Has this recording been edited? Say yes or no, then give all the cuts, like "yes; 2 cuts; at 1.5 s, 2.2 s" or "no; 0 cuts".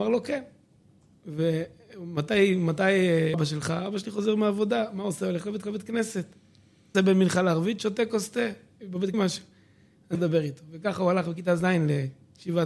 yes; 5 cuts; at 3.3 s, 5.6 s, 6.9 s, 9.1 s, 10.1 s